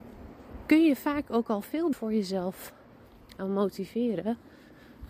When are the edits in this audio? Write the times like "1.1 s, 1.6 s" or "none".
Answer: 1.9 s, 3.4 s